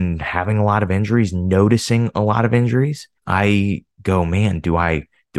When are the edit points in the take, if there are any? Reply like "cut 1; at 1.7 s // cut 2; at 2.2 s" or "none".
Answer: cut 1; at 3.2 s